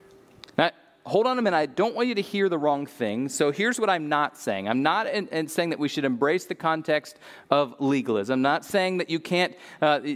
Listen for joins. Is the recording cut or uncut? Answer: uncut